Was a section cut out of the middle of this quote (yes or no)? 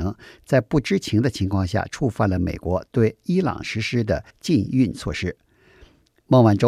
yes